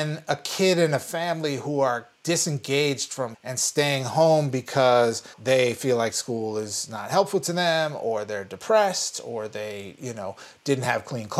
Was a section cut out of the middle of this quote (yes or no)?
yes